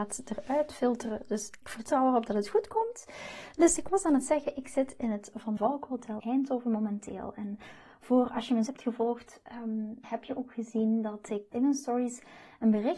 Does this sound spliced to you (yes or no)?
yes